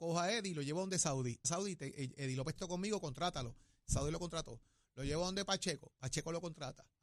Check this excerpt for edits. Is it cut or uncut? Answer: cut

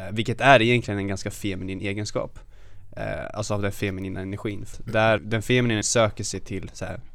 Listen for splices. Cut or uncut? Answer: cut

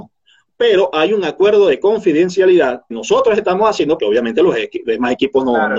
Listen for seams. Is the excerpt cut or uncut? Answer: cut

